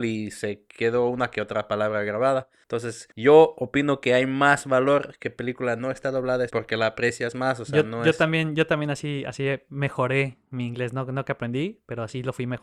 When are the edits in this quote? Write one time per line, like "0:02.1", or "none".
0:06.5